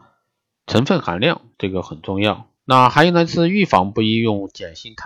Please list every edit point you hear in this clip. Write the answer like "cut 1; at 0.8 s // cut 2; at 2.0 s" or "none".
cut 1; at 1.5 s // cut 2; at 2.6 s